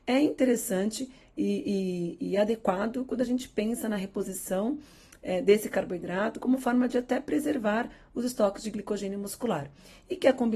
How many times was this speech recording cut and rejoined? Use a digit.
0